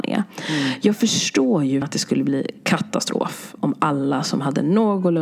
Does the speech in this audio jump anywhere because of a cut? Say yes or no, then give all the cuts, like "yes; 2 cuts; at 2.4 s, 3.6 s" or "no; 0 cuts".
yes; 1 cut; at 1.8 s